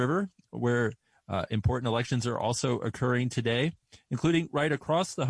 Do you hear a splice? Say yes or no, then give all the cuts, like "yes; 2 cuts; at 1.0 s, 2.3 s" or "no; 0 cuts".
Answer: no; 0 cuts